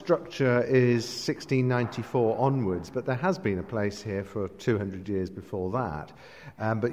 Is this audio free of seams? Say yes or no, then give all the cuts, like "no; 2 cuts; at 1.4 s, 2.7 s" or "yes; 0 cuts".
yes; 0 cuts